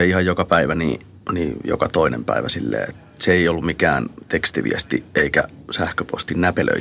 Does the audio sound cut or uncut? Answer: uncut